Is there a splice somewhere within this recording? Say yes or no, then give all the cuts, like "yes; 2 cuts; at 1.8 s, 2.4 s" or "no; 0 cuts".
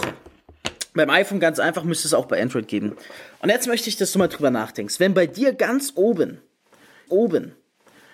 yes; 1 cut; at 7.1 s